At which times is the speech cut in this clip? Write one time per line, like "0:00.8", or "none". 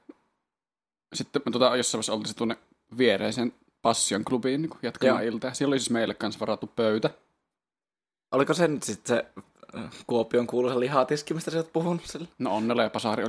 0:02.4

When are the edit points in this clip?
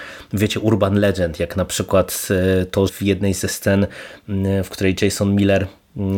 0:02.9

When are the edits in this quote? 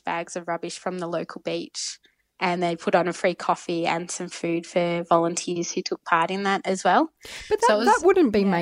none

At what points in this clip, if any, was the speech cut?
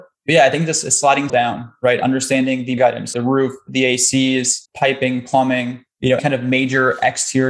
0:01.3
0:02.8
0:03.1
0:04.7
0:06.2

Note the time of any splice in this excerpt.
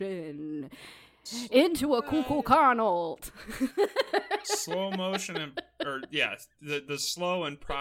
none

